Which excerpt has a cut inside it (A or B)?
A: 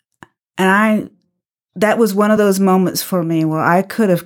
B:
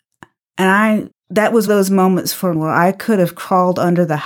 B